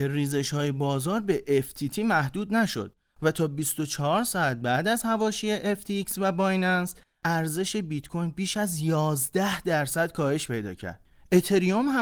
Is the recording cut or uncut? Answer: uncut